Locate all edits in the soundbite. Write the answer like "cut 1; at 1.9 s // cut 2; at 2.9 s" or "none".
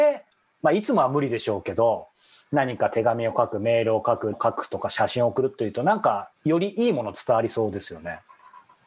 cut 1; at 4.3 s // cut 2; at 6.4 s

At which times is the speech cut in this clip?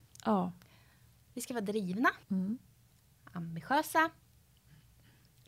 cut 1; at 2.2 s

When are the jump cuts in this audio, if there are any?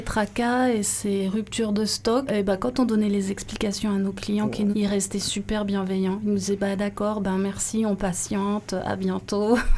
cut 1; at 2.3 s // cut 2; at 4.7 s

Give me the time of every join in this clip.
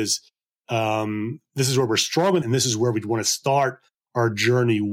cut 1; at 2.4 s

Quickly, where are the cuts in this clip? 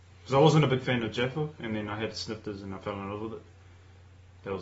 none

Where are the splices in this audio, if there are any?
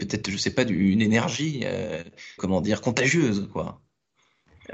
cut 1; at 2.4 s

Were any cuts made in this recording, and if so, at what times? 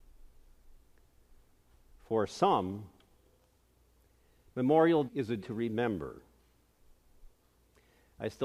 cut 1; at 5.1 s // cut 2; at 5.4 s

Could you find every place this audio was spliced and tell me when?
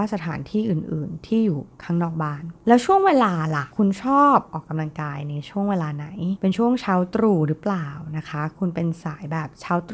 cut 1; at 3.7 s

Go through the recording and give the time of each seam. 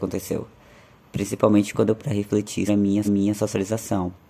cut 1; at 2.0 s // cut 2; at 2.7 s // cut 3; at 3.0 s

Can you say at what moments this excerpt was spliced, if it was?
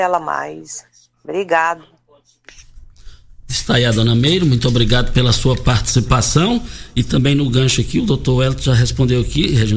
cut 1; at 1.1 s

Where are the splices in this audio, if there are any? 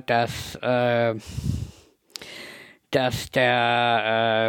none

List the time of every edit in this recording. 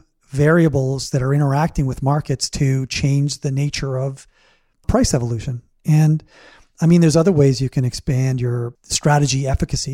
none

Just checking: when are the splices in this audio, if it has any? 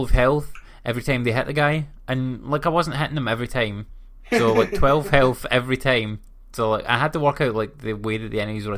none

